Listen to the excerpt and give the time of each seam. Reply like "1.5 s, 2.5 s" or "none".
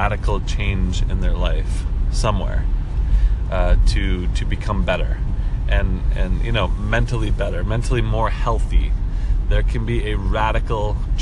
none